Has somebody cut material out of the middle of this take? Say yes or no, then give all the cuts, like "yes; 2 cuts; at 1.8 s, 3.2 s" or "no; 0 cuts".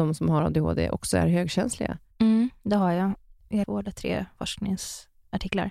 yes; 1 cut; at 3.6 s